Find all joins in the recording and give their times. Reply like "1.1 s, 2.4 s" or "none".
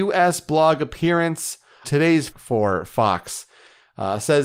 1.8 s, 2.3 s